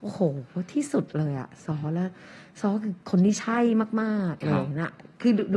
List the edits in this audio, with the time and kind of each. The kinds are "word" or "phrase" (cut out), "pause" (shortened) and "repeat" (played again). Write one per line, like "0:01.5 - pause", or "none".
none